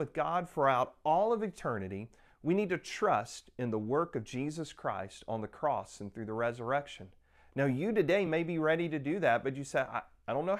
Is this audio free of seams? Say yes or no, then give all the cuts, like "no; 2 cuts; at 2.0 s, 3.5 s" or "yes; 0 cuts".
yes; 0 cuts